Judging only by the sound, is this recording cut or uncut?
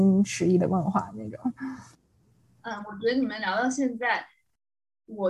uncut